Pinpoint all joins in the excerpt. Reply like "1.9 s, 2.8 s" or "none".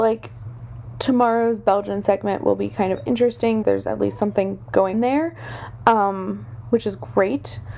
3.6 s, 4.9 s